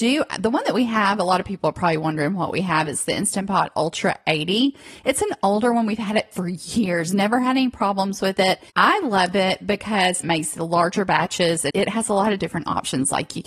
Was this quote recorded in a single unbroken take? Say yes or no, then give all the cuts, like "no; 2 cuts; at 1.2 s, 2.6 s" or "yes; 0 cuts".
no; 3 cuts; at 8.7 s, 10.2 s, 11.7 s